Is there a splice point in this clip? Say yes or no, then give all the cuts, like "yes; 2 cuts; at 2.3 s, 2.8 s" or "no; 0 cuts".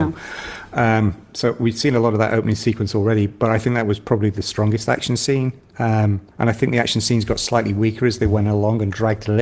yes; 1 cut; at 6.3 s